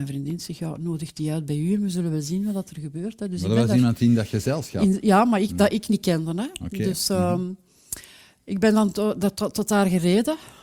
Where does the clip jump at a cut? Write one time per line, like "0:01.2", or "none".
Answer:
none